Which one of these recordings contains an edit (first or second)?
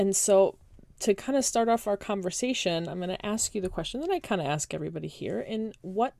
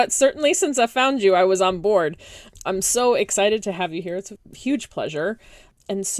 second